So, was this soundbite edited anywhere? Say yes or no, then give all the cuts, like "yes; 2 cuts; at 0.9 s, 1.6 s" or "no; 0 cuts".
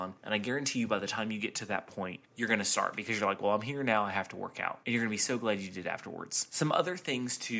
no; 0 cuts